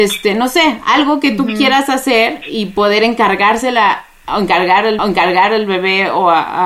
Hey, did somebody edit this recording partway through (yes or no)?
yes